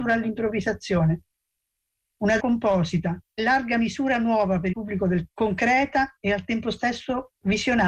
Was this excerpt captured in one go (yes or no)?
no